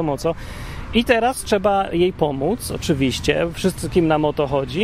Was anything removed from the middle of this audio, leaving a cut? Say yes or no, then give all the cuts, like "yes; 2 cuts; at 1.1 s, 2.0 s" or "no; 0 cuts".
no; 0 cuts